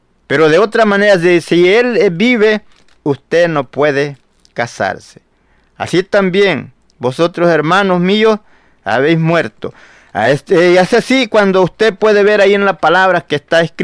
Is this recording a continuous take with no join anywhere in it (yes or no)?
yes